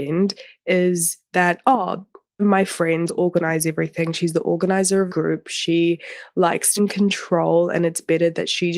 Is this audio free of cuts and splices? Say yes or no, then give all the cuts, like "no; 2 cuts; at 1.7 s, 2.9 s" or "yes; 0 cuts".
no; 4 cuts; at 2.4 s, 3.1 s, 5.1 s, 6.8 s